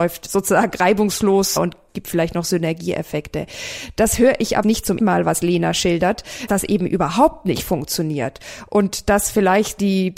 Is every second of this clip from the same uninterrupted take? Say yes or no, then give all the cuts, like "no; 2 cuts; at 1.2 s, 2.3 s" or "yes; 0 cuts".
no; 4 cuts; at 1.6 s, 4.6 s, 5.0 s, 6.5 s